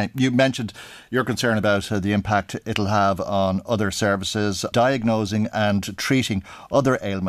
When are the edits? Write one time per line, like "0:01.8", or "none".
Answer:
0:04.7